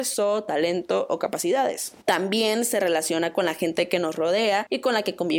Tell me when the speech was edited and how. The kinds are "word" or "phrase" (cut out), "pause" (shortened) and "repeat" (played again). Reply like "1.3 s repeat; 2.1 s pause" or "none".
2.0 s pause